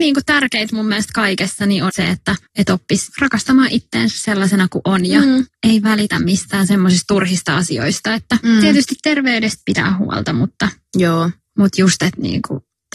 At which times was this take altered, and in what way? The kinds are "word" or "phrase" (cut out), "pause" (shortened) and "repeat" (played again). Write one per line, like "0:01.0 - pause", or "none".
0:01.9 - word
0:02.5 - pause
0:05.5 - pause